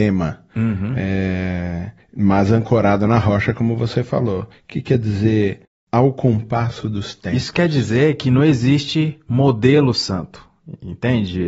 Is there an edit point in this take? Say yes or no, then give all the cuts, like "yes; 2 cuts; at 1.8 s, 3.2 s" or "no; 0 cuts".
yes; 1 cut; at 5.6 s